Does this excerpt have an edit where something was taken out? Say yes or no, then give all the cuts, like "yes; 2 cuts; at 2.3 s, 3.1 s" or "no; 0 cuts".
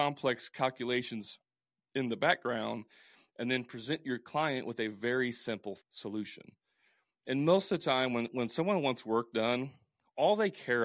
yes; 1 cut; at 5.8 s